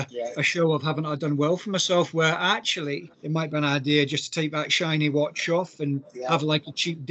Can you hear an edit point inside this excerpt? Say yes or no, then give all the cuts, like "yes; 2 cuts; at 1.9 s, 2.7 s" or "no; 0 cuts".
yes; 1 cut; at 3.1 s